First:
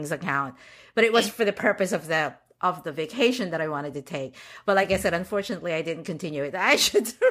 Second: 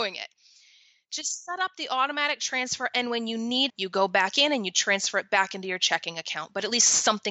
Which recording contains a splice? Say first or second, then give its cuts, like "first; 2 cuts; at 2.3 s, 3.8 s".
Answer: second; 1 cut; at 3.7 s